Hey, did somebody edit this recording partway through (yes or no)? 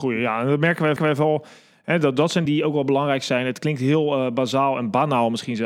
yes